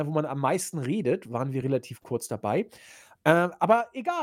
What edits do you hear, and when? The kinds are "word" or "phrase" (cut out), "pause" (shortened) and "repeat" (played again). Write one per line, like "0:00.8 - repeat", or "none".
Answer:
none